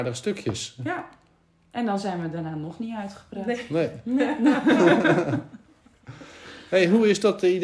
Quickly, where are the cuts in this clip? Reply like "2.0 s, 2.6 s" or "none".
none